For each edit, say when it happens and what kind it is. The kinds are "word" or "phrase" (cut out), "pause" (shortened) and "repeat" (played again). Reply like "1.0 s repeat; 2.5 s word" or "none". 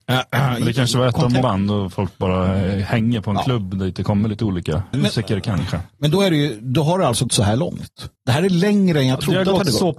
1.4 s word; 4.9 s word; 5.9 s pause; 7.3 s word; 8.2 s pause